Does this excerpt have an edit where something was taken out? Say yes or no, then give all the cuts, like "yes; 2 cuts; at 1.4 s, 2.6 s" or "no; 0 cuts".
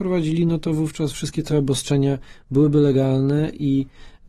no; 0 cuts